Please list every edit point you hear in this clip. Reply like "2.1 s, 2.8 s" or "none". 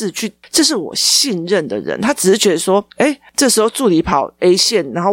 2.9 s